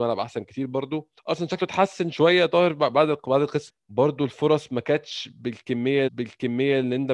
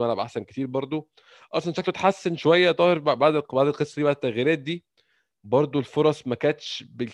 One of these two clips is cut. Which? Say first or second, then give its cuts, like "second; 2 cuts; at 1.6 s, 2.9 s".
first; 3 cuts; at 1.2 s, 3.7 s, 6.1 s